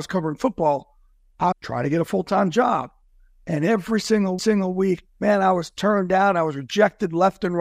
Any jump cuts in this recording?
yes; 2 cuts; at 1.5 s, 4.4 s

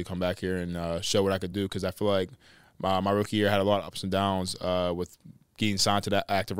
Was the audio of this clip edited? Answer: no; 0 cuts

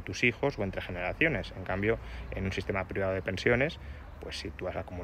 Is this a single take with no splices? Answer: yes; 0 cuts

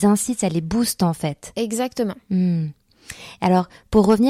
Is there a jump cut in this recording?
no; 0 cuts

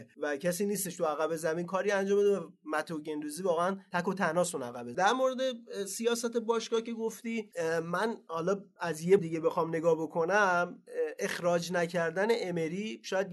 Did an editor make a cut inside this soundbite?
yes; 2 cuts; at 4.9 s, 9.2 s

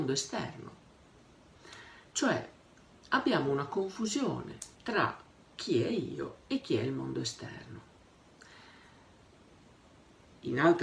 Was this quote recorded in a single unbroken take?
yes; 0 cuts

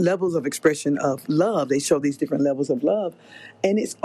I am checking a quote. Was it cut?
no; 0 cuts

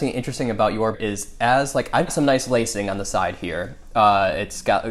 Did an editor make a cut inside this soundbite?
yes; 2 cuts; at 0.9 s, 2.1 s

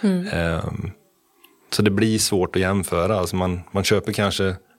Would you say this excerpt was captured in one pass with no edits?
yes; 0 cuts

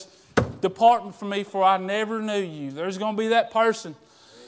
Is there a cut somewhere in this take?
no; 0 cuts

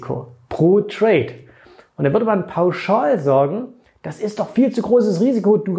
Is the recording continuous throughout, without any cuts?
yes; 0 cuts

